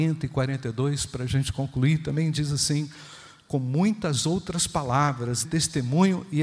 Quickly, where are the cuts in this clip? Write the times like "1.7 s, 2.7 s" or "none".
5.4 s